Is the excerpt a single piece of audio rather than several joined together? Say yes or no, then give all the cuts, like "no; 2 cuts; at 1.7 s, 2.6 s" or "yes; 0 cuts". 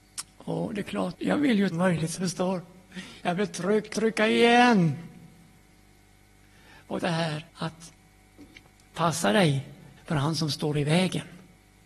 no; 7 cuts; at 1.1 s, 1.7 s, 2.2 s, 3.9 s, 7.0 s, 7.5 s, 10.0 s